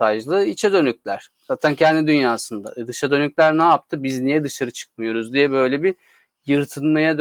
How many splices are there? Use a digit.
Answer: 0